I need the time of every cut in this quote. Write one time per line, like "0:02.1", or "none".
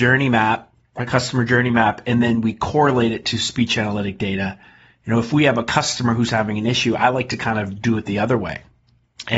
none